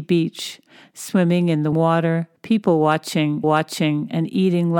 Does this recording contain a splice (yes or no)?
yes